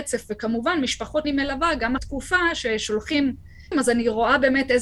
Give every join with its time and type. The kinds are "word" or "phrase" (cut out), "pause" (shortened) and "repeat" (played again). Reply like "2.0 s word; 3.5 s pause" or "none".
1.2 s word; 2.0 s word; 3.7 s word